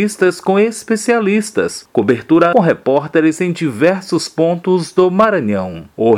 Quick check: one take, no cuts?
no; 1 cut; at 2.5 s

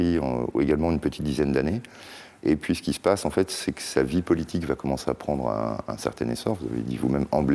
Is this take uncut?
yes; 0 cuts

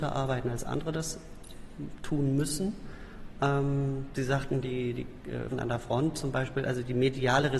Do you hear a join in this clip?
yes; 1 cut; at 5.5 s

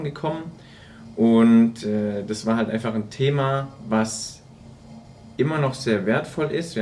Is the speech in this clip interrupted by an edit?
no; 0 cuts

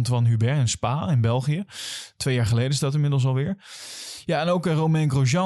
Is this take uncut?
yes; 0 cuts

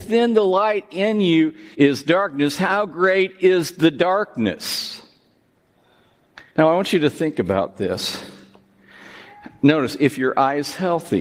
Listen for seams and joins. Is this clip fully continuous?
no; 2 cuts; at 1.7 s, 6.5 s

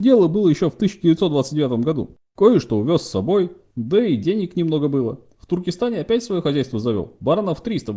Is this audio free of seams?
no; 1 cut; at 2.2 s

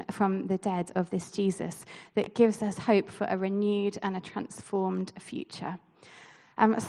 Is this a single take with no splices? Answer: yes; 0 cuts

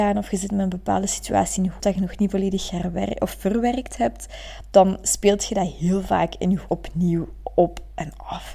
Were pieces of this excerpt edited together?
yes; 2 cuts; at 1.8 s, 6.7 s

